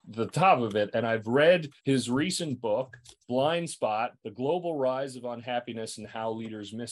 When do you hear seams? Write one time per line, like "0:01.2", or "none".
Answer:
0:01.8
0:03.2
0:04.2